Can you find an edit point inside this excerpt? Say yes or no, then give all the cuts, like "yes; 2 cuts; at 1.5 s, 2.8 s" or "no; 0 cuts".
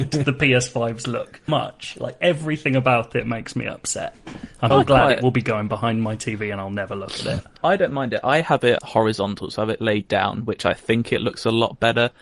yes; 4 cuts; at 1.5 s, 4.7 s, 7.6 s, 8.8 s